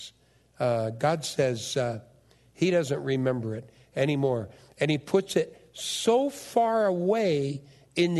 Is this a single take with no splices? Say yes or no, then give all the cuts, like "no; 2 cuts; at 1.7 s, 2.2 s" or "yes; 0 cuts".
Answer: yes; 0 cuts